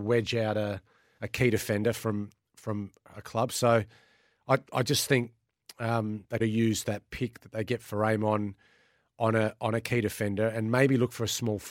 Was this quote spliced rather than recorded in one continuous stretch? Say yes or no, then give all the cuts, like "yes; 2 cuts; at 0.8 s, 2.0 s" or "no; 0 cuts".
yes; 1 cut; at 6.4 s